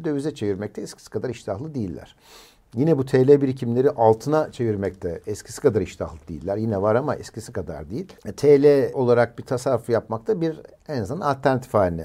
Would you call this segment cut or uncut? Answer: uncut